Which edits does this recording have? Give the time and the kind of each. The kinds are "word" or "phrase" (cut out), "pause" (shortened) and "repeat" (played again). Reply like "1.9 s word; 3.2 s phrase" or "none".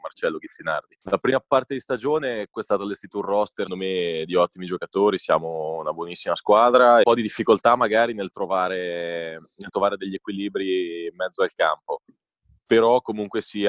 1.0 s pause; 2.5 s word; 3.7 s word; 7.0 s phrase